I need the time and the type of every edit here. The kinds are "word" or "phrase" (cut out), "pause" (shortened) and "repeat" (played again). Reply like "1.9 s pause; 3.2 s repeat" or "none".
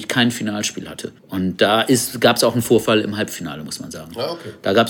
1.2 s pause